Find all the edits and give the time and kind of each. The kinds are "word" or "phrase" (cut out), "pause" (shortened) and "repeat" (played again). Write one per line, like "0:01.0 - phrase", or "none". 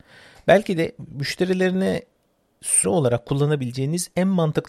0:02.8 - word